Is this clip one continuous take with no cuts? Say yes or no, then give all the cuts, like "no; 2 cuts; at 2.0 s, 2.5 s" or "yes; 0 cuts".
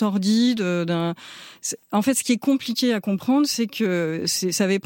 yes; 0 cuts